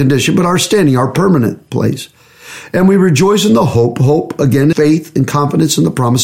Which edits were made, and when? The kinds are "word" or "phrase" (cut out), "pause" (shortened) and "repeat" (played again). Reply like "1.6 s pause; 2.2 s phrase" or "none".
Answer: 4.7 s word